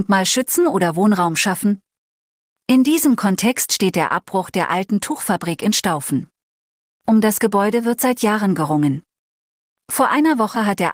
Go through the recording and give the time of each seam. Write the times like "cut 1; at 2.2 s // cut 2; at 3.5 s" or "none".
none

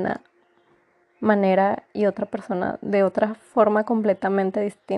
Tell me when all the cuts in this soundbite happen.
none

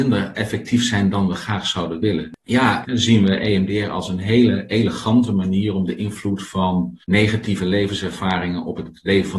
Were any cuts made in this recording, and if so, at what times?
cut 1; at 2.4 s // cut 2; at 7.0 s

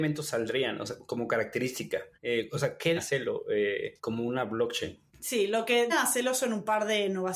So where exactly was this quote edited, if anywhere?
cut 1; at 2.1 s // cut 2; at 3.0 s // cut 3; at 4.0 s // cut 4; at 5.1 s // cut 5; at 5.9 s

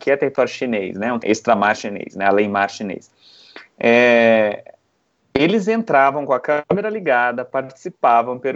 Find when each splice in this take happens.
cut 1; at 1.2 s

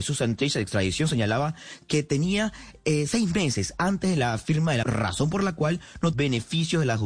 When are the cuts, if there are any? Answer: cut 1; at 4.8 s // cut 2; at 6.1 s

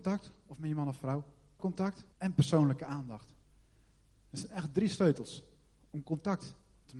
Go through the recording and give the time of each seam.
cut 1; at 1.6 s // cut 2; at 2.1 s

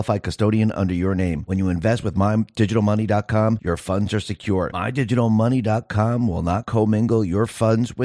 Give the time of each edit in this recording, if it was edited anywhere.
none

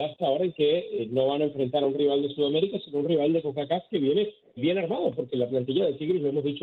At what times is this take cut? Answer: cut 1; at 4.6 s

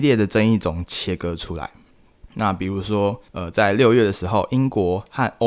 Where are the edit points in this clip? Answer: cut 1; at 2.3 s // cut 2; at 3.3 s

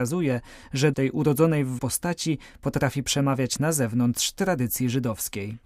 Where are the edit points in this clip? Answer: cut 1; at 0.9 s // cut 2; at 1.8 s // cut 3; at 3.6 s

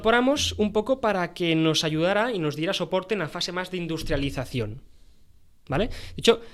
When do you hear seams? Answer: none

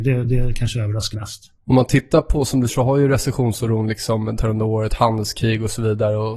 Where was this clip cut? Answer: cut 1; at 1.1 s // cut 2; at 2.7 s // cut 3; at 4.4 s

